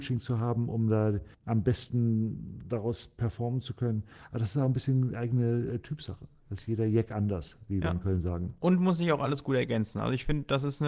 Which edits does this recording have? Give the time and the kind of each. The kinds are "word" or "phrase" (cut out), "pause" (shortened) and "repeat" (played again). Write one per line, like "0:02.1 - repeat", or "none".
0:01.3 - pause